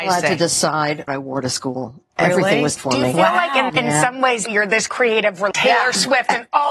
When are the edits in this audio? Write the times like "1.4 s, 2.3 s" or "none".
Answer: 1.1 s, 2.8 s, 3.7 s, 4.5 s, 4.9 s, 5.5 s